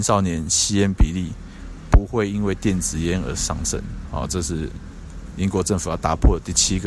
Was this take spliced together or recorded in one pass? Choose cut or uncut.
uncut